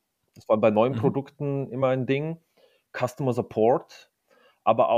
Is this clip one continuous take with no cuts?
yes; 0 cuts

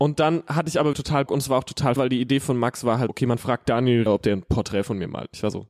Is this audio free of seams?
no; 5 cuts; at 0.9 s, 1.3 s, 2.0 s, 3.1 s, 4.1 s

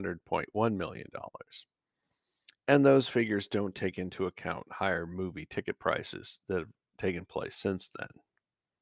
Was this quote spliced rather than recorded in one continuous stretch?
yes; 1 cut; at 2.6 s

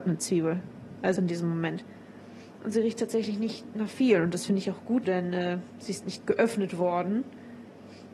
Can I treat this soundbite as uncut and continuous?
no; 2 cuts; at 1.2 s, 5.0 s

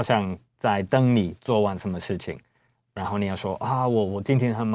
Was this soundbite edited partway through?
no; 0 cuts

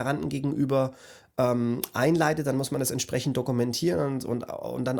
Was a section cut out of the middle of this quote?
no; 0 cuts

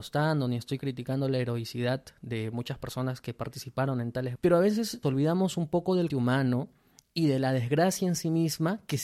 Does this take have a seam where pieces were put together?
yes; 3 cuts; at 4.4 s, 5.0 s, 6.1 s

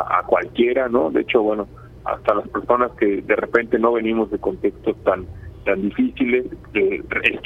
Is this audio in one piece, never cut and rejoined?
yes; 0 cuts

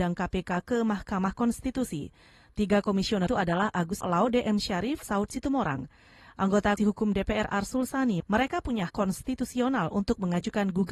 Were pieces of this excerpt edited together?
yes; 6 cuts; at 3.3 s, 4.0 s, 5.0 s, 6.8 s, 8.2 s, 8.9 s

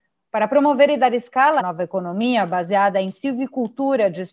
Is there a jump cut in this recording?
yes; 1 cut; at 1.6 s

